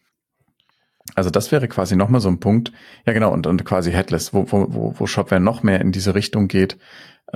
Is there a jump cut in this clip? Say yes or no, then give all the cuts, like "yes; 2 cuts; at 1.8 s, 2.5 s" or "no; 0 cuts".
no; 0 cuts